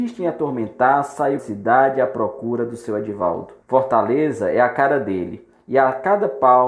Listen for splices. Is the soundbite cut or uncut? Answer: cut